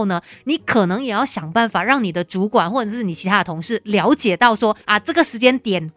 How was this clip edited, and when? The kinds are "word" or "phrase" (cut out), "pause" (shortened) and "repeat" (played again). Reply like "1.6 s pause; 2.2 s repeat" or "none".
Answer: 4.8 s pause

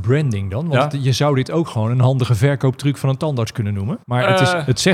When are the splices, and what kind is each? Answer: 4.0 s pause

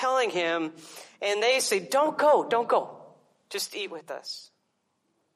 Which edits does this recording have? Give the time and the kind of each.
none

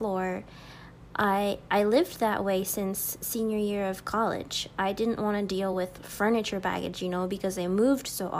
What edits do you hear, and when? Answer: none

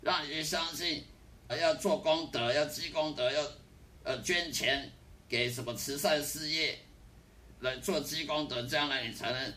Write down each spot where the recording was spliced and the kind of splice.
1.5 s word

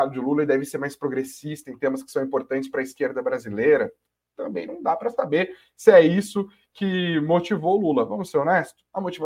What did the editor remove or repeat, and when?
none

